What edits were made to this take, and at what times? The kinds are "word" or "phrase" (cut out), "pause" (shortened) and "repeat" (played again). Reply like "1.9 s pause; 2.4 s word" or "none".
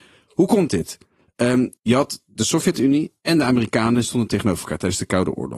1.8 s pause